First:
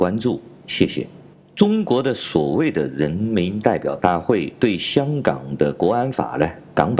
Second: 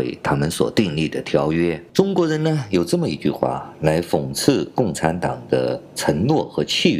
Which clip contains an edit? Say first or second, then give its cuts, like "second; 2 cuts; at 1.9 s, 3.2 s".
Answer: second; 1 cut; at 1.9 s